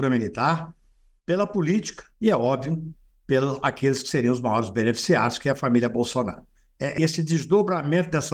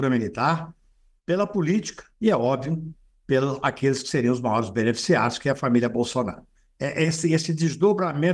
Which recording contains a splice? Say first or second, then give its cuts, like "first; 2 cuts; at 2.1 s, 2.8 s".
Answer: first; 1 cut; at 7.0 s